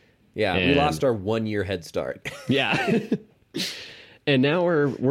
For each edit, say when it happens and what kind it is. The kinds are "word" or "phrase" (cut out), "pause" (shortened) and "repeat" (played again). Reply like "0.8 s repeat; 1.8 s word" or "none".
3.3 s pause